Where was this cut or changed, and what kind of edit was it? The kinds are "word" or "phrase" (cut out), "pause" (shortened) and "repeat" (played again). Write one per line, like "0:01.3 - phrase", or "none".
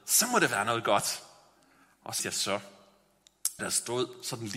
0:02.2 - word
0:03.6 - word